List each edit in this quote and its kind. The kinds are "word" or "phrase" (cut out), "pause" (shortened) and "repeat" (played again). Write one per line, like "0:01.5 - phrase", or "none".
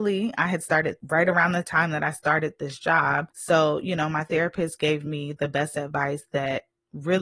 0:01.0 - word
0:03.3 - pause